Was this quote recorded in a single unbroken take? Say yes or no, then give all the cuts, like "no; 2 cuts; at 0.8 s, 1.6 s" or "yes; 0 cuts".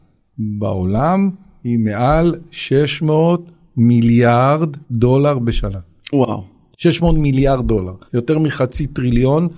no; 2 cuts; at 4.8 s, 8.1 s